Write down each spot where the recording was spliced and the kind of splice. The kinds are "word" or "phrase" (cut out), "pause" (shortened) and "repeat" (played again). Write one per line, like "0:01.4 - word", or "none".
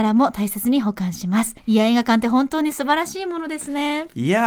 0:01.6 - pause